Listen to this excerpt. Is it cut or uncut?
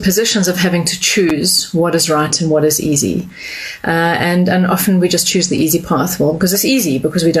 uncut